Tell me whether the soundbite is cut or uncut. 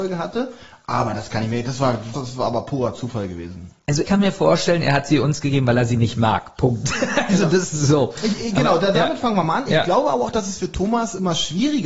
cut